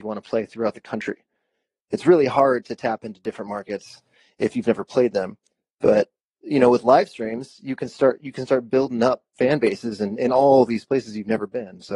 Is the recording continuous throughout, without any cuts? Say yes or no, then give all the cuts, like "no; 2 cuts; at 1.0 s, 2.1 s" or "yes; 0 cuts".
yes; 0 cuts